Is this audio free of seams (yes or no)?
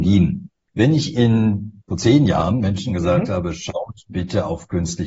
no